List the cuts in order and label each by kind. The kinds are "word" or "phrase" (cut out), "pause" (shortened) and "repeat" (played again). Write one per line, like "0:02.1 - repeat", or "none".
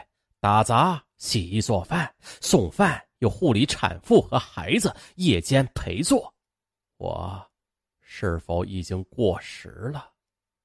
none